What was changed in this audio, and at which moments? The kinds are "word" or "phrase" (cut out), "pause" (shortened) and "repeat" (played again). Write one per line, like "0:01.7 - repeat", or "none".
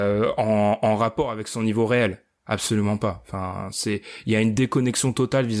none